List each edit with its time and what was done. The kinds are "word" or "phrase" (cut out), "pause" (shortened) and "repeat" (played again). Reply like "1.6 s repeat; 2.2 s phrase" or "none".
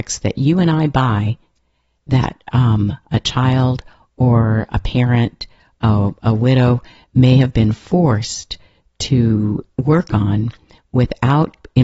none

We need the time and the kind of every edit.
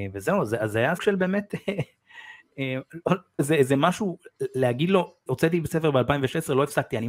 1.0 s word; 3.4 s word; 5.3 s word

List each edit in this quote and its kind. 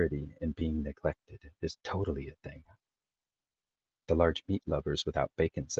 none

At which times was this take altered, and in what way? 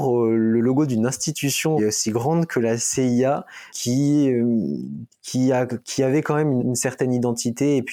1.8 s word; 3.7 s word; 6.6 s word

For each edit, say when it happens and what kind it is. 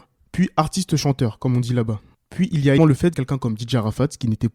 2.8 s word; 3.1 s word

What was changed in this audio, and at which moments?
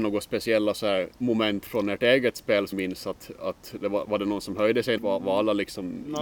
1.2 s pause; 2.7 s word; 5.0 s phrase

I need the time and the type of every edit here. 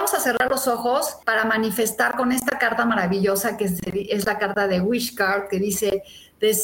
1.2 s pause

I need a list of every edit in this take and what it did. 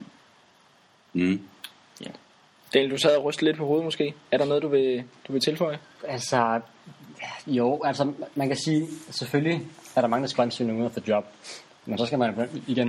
none

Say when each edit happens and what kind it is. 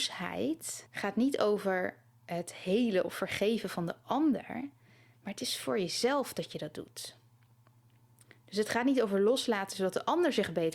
none

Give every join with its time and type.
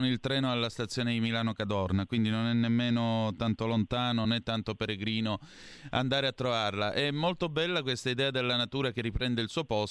none

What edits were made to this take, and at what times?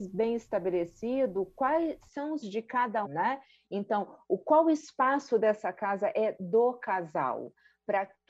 2.4 s word; 3.0 s word

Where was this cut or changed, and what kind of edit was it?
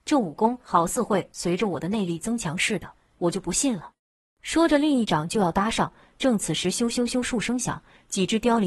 4.0 s pause

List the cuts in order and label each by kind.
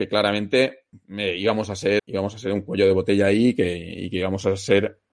2.0 s word

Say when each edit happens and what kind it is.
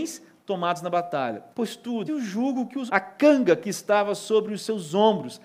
1.5 s pause; 2.1 s word; 2.9 s word

